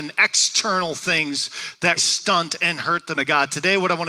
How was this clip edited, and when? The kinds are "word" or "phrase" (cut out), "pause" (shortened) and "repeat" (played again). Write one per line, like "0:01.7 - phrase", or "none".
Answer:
0:02.0 - word
0:03.1 - word